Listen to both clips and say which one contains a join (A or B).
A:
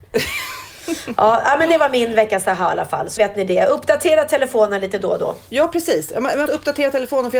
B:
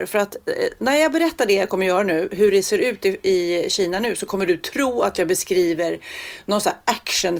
A